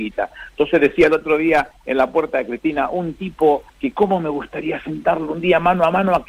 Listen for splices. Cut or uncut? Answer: cut